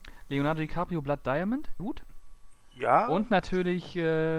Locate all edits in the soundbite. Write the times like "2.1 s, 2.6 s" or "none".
1.8 s